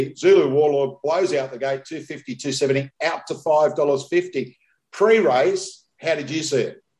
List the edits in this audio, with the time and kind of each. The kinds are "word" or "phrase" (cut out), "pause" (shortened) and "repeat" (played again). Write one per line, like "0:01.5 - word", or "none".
none